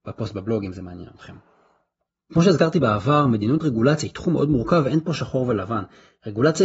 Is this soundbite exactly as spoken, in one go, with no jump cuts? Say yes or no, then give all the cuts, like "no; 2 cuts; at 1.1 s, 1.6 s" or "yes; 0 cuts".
yes; 0 cuts